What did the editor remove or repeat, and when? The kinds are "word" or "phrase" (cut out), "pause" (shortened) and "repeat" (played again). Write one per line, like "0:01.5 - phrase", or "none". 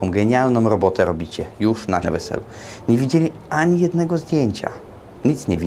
0:02.0 - phrase